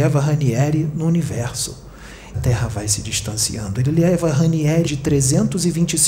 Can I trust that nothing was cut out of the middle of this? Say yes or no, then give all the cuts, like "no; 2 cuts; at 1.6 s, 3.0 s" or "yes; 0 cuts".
no; 2 cuts; at 2.3 s, 4.8 s